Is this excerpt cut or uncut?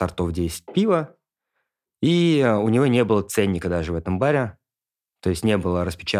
uncut